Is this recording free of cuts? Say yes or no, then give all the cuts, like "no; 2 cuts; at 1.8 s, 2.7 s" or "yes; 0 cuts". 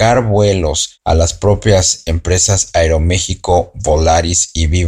yes; 0 cuts